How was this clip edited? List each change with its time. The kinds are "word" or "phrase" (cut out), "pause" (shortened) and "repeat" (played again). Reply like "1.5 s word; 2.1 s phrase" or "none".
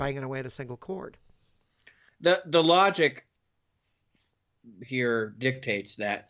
none